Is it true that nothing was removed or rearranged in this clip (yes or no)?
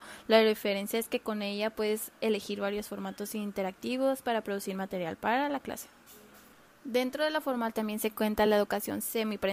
yes